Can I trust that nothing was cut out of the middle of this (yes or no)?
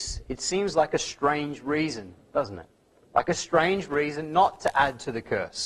yes